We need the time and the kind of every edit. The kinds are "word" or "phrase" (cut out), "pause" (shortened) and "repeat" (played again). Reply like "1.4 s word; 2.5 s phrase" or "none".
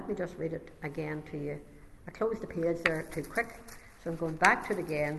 none